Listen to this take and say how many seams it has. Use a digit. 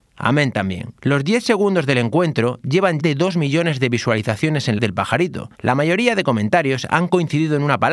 4